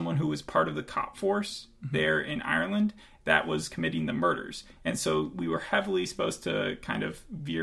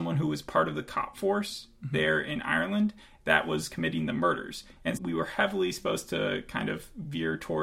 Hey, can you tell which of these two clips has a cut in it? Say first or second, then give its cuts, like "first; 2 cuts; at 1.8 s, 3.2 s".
second; 1 cut; at 5.0 s